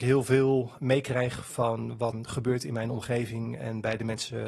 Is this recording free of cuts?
no; 1 cut; at 2.1 s

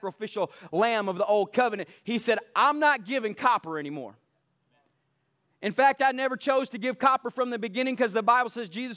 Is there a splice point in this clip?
no; 0 cuts

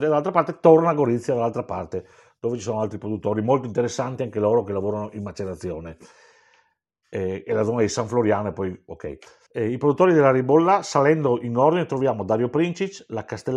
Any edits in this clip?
yes; 1 cut; at 9.5 s

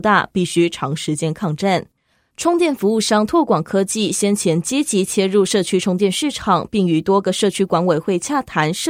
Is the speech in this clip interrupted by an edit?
no; 0 cuts

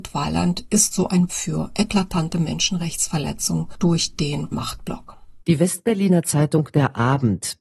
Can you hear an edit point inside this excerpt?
yes; 3 cuts; at 1.3 s, 4.5 s, 5.4 s

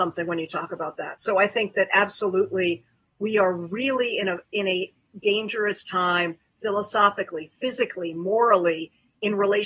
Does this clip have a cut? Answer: no; 0 cuts

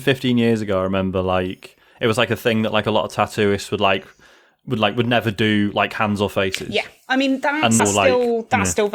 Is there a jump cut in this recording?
yes; 1 cut; at 7.8 s

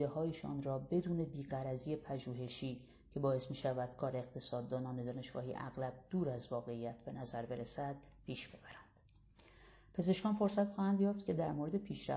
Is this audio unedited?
yes; 0 cuts

